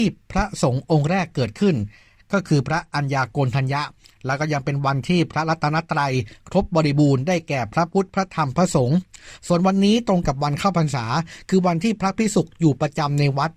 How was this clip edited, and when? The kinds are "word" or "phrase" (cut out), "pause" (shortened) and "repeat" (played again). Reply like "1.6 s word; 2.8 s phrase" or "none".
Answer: none